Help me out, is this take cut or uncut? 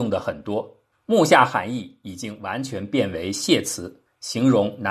cut